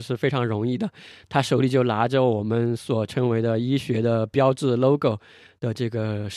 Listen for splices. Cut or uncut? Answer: uncut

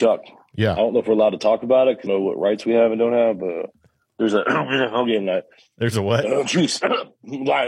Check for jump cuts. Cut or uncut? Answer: cut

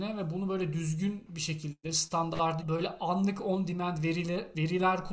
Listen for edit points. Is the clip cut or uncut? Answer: cut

